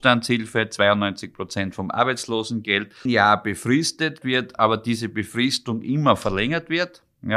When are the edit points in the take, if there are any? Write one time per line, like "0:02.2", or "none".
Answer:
0:03.1
0:04.2